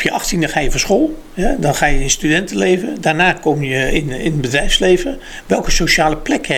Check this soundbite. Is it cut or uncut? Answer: uncut